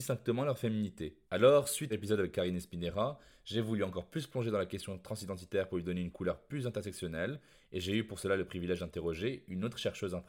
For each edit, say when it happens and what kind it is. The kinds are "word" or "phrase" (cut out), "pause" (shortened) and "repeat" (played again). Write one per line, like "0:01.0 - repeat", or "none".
0:01.2 - pause
0:01.9 - phrase